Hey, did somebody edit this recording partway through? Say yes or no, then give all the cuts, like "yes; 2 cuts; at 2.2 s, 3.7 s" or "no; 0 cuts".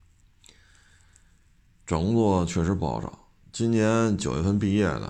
no; 0 cuts